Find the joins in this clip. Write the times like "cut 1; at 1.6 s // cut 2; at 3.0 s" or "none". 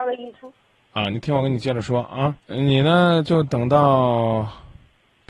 cut 1; at 2.4 s